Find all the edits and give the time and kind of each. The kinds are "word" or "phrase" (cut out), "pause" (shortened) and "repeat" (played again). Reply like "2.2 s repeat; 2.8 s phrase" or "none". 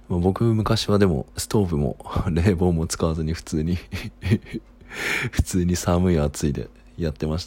1.3 s pause